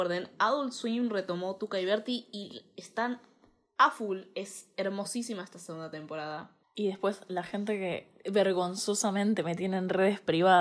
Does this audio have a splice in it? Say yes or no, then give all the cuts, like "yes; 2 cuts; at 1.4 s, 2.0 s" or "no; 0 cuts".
no; 0 cuts